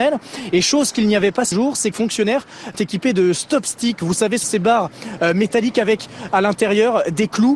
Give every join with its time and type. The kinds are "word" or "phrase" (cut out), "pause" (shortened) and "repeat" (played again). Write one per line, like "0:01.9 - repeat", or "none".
0:01.5 - word
0:01.9 - word
0:02.7 - word
0:04.4 - word